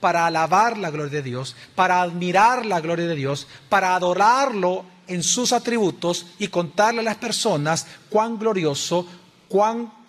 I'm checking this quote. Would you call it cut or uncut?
uncut